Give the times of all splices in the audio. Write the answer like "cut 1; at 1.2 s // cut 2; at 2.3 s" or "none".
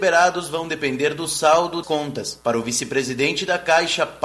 cut 1; at 1.8 s